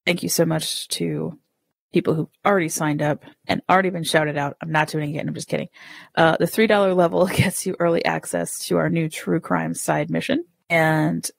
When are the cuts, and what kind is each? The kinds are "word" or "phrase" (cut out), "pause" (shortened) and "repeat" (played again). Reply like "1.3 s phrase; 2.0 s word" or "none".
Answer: none